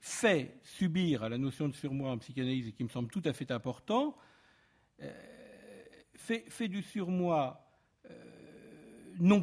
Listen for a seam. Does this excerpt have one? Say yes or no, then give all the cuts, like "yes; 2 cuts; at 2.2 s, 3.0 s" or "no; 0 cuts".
no; 0 cuts